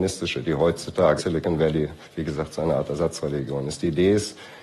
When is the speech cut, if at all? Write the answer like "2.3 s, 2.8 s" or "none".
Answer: 1.2 s, 2.0 s